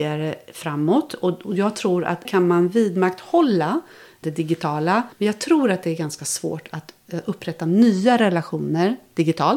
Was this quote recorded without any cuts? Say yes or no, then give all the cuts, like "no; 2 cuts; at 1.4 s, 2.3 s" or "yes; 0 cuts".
no; 3 cuts; at 2.2 s, 4.2 s, 5.1 s